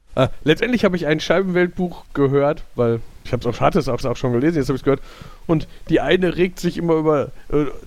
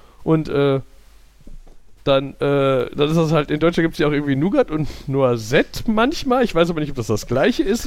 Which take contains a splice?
first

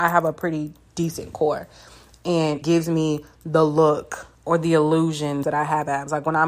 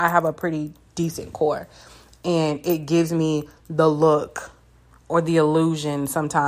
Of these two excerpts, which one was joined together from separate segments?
first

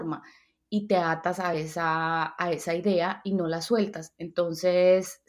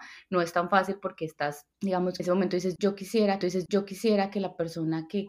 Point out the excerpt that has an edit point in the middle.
second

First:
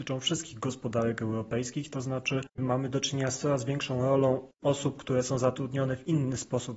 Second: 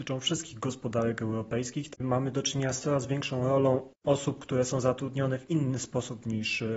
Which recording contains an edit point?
second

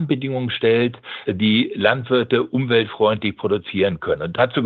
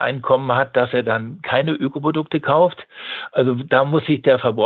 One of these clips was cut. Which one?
first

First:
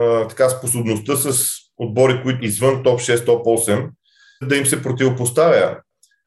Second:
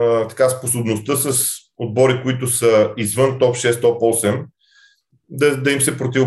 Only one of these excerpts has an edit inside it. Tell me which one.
first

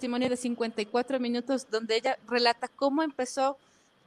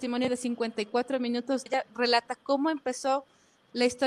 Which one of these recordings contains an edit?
second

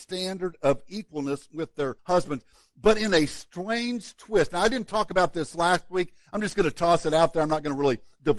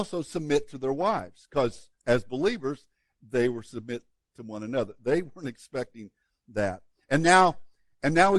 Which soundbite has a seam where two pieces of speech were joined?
first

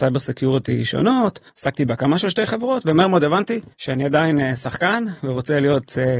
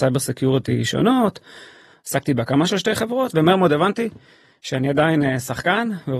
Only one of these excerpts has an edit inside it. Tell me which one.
first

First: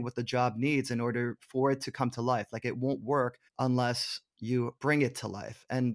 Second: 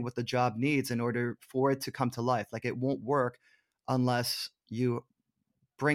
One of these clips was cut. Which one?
first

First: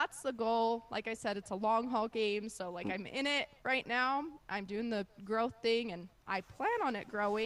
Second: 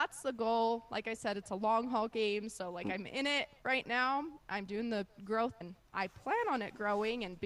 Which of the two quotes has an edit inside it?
second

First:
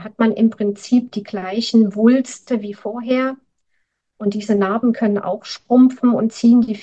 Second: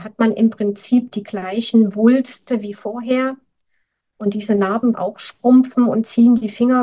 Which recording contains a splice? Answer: second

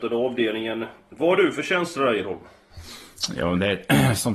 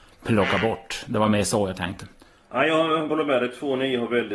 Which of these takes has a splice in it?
second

